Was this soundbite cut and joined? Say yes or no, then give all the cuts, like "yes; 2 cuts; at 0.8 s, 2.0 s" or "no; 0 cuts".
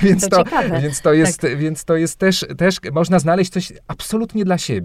no; 0 cuts